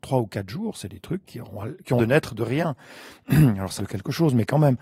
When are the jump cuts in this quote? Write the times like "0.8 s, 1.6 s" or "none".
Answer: 1.2 s, 2.0 s, 3.8 s